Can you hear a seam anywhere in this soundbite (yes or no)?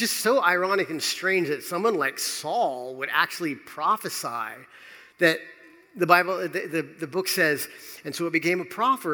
no